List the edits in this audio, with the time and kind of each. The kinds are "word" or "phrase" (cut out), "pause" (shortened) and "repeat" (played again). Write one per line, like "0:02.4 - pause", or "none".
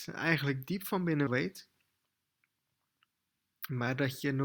0:01.3 - word